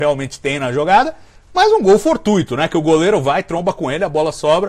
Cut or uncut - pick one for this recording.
uncut